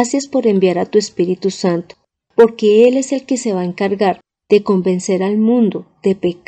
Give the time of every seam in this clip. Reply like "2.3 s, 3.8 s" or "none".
none